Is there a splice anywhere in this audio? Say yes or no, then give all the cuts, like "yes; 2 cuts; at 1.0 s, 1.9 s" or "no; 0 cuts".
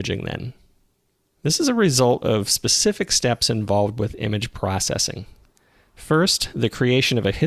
no; 0 cuts